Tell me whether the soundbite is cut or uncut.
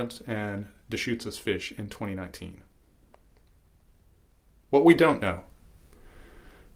uncut